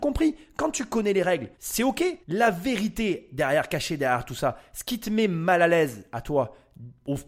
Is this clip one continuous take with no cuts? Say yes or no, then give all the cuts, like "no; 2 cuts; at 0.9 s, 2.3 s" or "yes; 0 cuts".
no; 2 cuts; at 1.5 s, 2.2 s